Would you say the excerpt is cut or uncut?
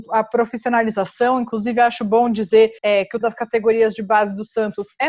cut